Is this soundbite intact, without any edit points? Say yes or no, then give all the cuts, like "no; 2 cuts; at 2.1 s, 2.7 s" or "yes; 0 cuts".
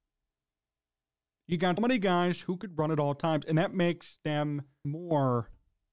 no; 2 cuts; at 1.8 s, 4.8 s